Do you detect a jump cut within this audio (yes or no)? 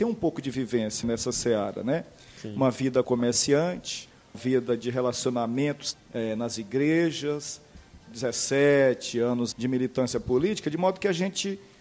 yes